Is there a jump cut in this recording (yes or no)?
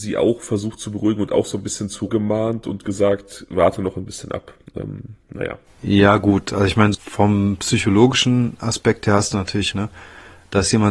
yes